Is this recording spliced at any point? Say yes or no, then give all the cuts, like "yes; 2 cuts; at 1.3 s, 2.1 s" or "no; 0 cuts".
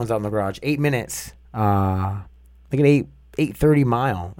no; 0 cuts